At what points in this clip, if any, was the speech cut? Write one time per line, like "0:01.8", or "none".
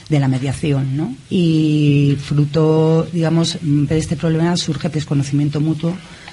0:01.3
0:03.9
0:04.9